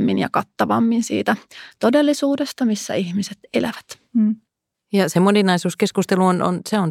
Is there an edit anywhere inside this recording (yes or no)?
no